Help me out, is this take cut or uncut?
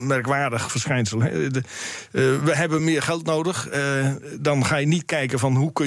uncut